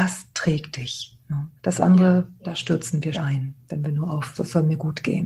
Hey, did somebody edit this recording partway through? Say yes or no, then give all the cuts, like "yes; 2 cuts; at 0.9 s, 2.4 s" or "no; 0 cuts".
yes; 3 cuts; at 1.6 s, 3.1 s, 4.3 s